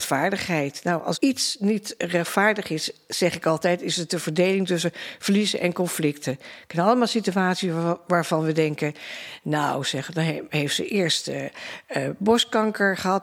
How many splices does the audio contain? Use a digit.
1